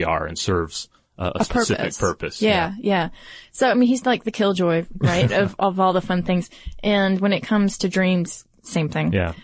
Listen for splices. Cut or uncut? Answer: uncut